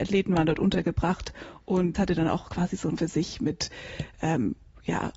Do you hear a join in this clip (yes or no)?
yes